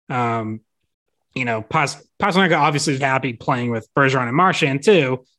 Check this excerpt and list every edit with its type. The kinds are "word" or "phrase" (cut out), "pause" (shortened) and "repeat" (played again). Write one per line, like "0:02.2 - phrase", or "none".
0:02.1 - pause
0:03.0 - word